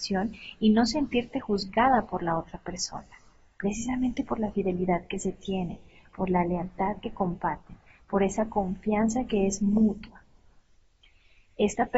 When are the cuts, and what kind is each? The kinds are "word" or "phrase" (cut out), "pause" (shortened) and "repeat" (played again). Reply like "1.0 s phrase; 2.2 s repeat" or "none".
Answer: none